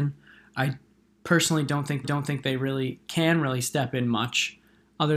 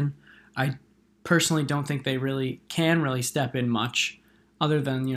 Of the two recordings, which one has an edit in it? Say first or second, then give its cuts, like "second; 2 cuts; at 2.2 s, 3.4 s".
first; 1 cut; at 2.0 s